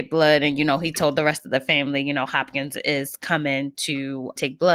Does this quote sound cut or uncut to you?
uncut